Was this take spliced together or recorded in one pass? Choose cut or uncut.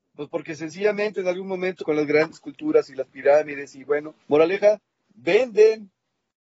cut